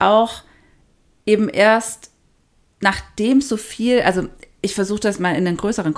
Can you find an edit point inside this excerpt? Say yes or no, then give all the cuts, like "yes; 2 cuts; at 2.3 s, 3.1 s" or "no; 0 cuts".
no; 0 cuts